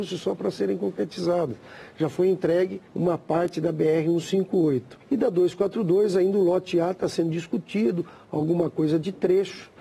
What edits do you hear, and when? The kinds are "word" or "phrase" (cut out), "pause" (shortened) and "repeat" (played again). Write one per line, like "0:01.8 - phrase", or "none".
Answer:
0:02.9 - pause
0:05.0 - pause